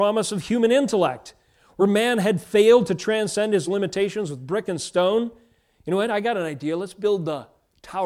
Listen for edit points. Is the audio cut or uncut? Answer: uncut